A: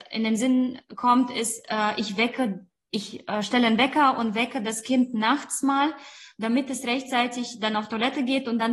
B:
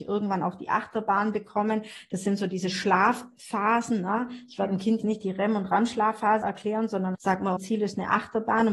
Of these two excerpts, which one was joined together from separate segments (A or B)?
B